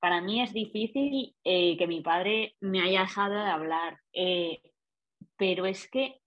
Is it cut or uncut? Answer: cut